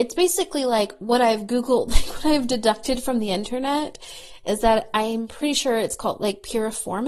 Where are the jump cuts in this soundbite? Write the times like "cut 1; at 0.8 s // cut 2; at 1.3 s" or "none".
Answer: none